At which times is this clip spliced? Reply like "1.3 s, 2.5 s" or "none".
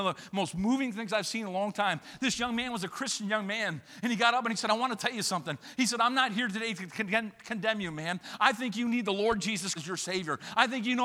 9.8 s